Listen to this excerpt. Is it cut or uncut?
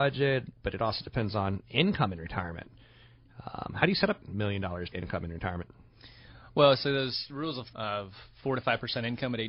cut